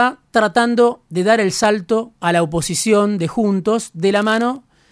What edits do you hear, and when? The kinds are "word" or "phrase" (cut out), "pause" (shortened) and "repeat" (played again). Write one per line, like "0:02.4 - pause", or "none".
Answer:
0:01.1 - pause
0:02.2 - pause